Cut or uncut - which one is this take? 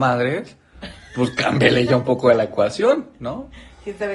uncut